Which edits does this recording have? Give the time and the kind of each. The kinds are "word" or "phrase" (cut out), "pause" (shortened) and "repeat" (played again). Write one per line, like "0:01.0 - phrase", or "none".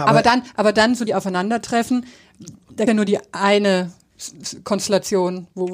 0:01.1 - phrase
0:02.9 - phrase